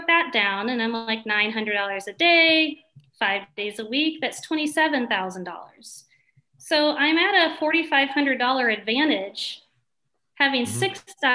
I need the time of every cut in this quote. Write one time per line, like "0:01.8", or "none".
none